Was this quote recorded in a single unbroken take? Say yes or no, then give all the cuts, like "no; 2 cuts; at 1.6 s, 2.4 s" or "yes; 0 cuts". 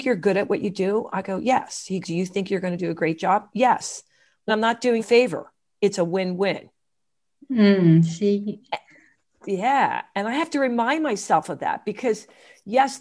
no; 3 cuts; at 2.0 s, 4.5 s, 5.0 s